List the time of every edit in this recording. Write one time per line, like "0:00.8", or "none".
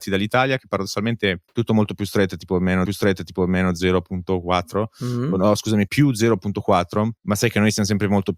0:01.5
0:02.8
0:05.9
0:07.2